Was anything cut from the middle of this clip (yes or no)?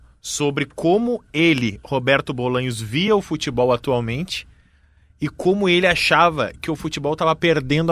no